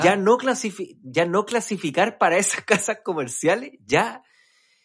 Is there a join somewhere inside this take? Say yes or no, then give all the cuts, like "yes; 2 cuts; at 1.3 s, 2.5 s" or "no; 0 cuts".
no; 0 cuts